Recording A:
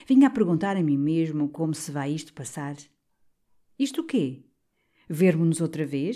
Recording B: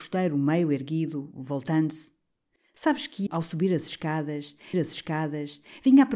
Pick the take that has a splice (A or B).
B